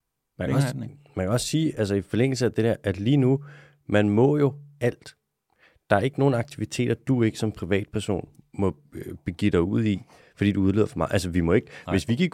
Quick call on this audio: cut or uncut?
uncut